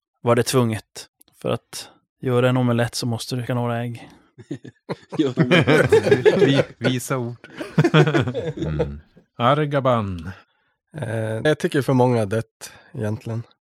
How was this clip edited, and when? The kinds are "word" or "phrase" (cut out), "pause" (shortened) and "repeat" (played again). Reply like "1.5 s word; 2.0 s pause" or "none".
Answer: 3.5 s word; 5.4 s word; 11.5 s word